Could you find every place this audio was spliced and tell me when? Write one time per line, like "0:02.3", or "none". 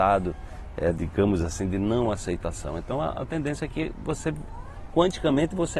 none